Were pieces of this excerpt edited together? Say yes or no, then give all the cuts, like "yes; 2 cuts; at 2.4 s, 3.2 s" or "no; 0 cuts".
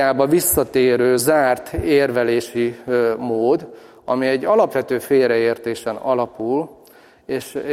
no; 0 cuts